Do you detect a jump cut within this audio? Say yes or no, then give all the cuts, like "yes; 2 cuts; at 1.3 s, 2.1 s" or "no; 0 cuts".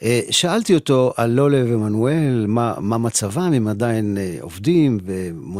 no; 0 cuts